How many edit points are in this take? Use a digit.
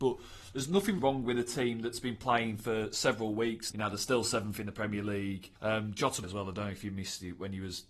4